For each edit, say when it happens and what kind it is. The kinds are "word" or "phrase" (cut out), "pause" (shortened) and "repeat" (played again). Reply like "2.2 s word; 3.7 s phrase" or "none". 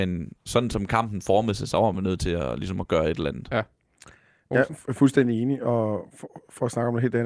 none